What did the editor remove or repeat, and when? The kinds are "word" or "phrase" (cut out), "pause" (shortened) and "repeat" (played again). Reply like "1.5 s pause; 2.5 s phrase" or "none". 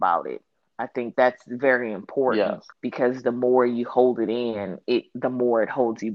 1.1 s word; 2.7 s pause